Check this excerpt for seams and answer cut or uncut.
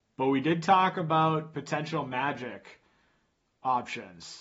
uncut